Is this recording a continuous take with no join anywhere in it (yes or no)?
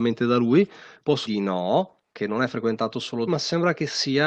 no